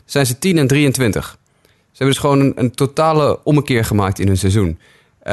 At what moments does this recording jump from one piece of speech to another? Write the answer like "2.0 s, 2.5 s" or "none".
none